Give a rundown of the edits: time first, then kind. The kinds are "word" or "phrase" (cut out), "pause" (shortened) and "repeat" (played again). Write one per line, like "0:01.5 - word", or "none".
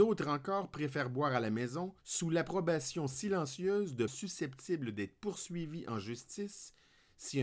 0:02.0 - pause
0:04.1 - word